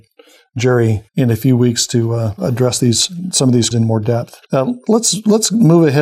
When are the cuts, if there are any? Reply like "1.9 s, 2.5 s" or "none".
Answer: 1.1 s, 3.7 s, 4.5 s